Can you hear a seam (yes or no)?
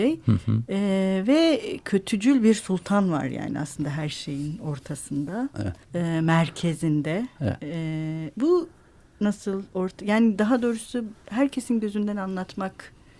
yes